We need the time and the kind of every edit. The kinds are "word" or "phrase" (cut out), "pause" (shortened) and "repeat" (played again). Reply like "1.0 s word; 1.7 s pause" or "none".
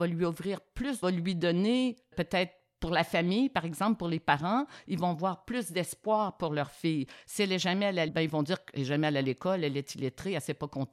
1.0 s phrase; 2.1 s word; 8.1 s word